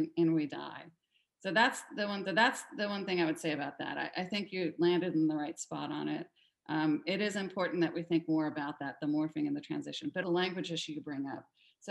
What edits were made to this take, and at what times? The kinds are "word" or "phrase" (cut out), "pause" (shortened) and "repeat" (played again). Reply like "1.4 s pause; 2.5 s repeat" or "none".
2.2 s repeat; 10.2 s word